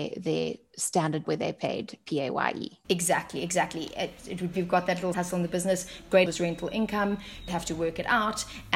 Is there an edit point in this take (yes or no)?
yes